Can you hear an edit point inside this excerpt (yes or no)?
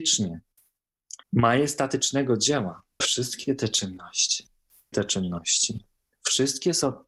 yes